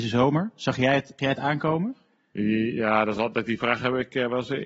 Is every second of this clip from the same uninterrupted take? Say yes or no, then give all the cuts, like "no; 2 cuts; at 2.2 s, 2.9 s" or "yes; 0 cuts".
no; 1 cut; at 1.2 s